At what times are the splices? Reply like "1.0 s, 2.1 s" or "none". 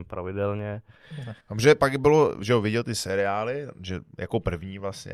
1.4 s, 2.4 s